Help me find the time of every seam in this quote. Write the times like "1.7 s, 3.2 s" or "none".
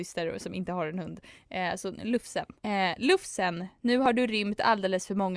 2.6 s

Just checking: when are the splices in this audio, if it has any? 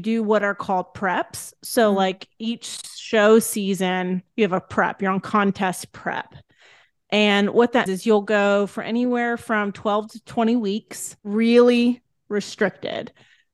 4.3 s, 7.9 s, 11.2 s

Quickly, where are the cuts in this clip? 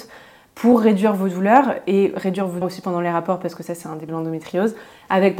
2.6 s, 4.1 s

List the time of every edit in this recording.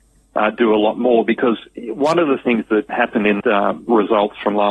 2.9 s, 3.4 s

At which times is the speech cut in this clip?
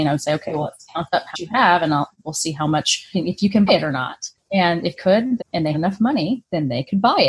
1.3 s, 3.1 s, 3.7 s, 5.0 s, 5.4 s, 5.7 s

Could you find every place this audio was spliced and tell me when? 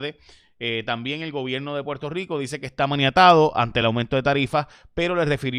none

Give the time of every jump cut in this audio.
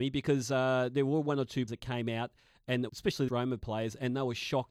1.7 s, 2.9 s, 3.3 s

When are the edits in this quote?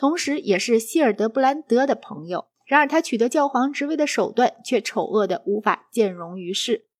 2.5 s

